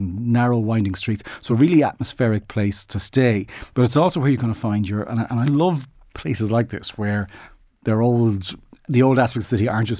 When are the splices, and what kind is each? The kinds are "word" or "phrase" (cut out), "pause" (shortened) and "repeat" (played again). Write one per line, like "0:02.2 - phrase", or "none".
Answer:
none